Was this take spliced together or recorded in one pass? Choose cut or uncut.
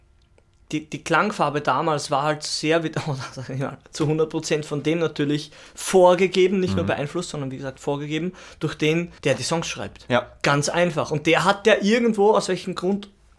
cut